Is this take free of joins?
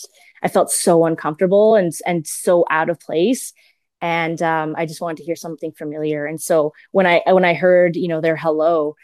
yes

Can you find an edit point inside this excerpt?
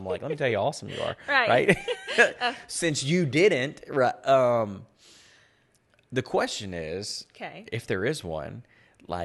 no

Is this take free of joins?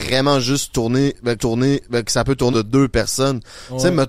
no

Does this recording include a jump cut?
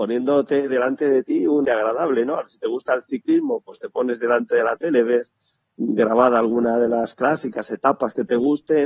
yes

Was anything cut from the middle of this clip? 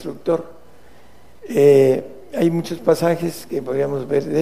no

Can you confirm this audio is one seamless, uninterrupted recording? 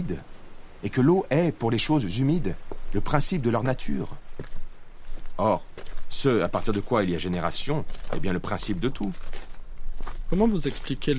yes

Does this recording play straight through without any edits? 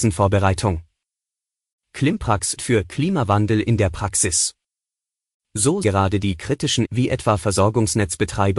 no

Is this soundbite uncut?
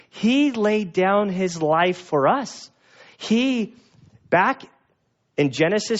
yes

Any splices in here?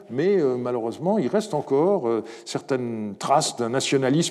no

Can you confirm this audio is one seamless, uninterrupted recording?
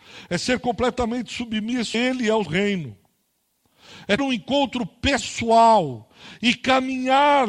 no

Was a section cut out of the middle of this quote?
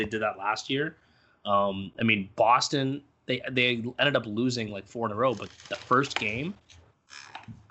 no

